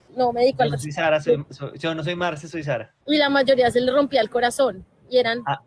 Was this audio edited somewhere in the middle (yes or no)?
yes